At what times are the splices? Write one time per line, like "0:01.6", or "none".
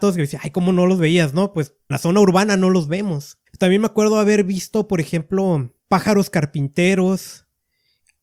0:01.9
0:03.5
0:05.8